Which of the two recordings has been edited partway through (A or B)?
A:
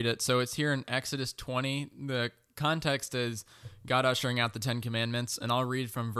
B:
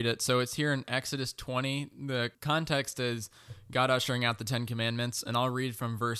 B